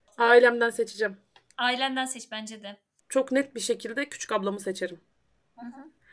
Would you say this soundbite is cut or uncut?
uncut